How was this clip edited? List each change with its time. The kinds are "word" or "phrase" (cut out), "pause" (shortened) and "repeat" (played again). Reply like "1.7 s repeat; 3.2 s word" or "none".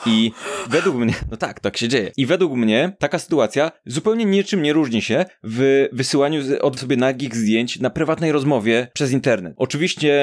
1.6 s word; 6.8 s word